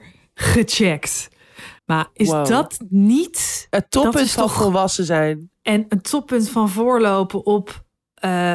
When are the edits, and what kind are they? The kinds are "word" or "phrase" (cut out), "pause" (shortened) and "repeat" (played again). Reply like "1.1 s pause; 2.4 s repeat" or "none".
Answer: 1.8 s pause; 5.6 s pause